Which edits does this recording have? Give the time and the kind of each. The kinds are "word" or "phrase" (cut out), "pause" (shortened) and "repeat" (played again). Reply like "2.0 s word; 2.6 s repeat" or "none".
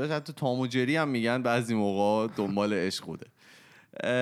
none